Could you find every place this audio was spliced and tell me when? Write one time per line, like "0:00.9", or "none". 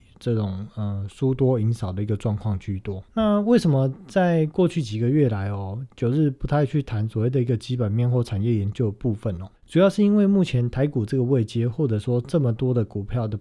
0:03.1
0:09.6